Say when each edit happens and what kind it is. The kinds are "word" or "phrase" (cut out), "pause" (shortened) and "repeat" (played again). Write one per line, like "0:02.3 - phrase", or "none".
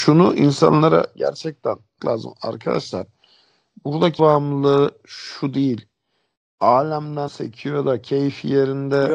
0:02.0 - word
0:04.2 - word
0:07.3 - word